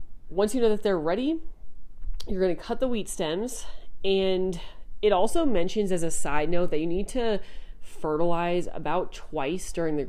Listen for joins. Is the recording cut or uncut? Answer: uncut